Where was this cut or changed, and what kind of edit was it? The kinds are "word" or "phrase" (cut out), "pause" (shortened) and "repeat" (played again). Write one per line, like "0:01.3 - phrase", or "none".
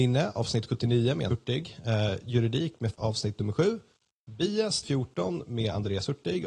0:01.3 - word
0:02.9 - word
0:04.8 - word